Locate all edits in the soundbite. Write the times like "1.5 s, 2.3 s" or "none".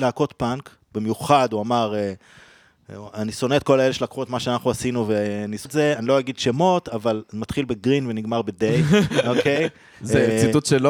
5.7 s